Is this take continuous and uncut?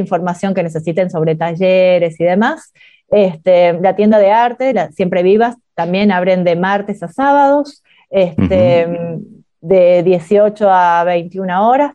yes; 0 cuts

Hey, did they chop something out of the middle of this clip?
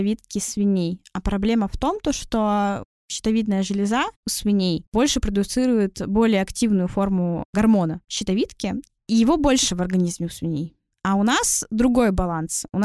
no; 0 cuts

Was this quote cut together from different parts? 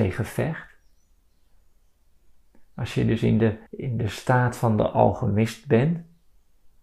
yes; 1 cut; at 3.7 s

